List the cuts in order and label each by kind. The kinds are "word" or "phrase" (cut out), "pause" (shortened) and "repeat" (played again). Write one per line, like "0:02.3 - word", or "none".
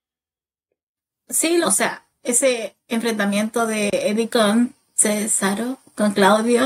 0:01.6 - word
0:04.3 - word